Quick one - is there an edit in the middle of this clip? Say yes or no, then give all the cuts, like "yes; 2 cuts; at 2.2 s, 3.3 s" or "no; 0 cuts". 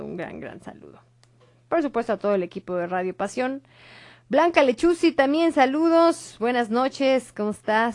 no; 0 cuts